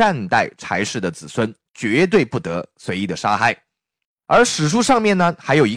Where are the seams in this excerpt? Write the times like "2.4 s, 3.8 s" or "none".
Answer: 4.1 s